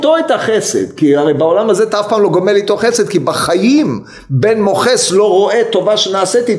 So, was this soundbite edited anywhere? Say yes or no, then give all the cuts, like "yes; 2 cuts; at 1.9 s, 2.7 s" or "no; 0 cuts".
no; 0 cuts